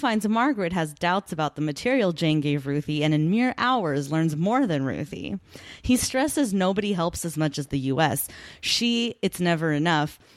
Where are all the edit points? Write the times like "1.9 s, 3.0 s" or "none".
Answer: none

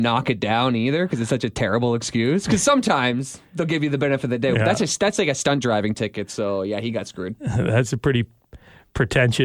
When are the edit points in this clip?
none

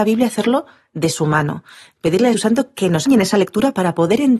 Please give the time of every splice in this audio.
2.3 s, 3.1 s

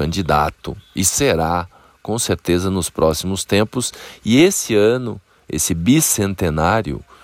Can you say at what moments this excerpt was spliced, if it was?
none

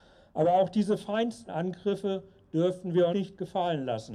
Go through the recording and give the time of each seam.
1.5 s, 3.1 s

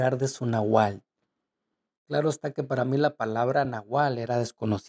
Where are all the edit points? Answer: none

